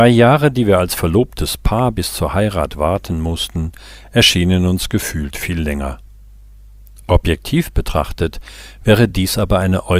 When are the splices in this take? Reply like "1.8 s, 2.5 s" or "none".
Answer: none

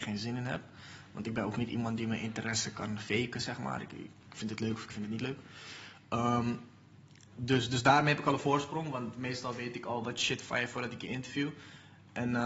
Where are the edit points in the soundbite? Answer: none

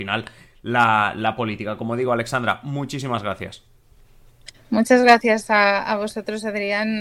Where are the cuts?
none

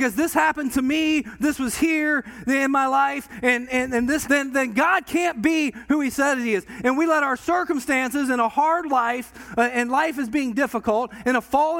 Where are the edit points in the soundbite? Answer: 4.2 s

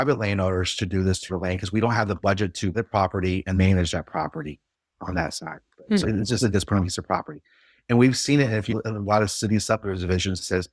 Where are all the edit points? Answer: 1.3 s, 2.7 s, 3.6 s, 6.0 s, 6.5 s, 8.7 s

